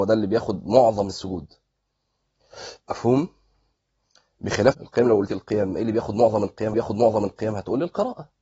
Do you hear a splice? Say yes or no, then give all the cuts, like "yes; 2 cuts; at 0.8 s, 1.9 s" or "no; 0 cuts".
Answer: yes; 4 cuts; at 2.8 s, 4.7 s, 5.3 s, 6.7 s